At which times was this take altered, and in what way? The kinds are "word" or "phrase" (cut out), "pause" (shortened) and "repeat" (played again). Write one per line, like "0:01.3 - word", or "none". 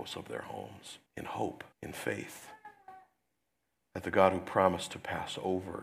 0:01.1 - pause
0:01.7 - pause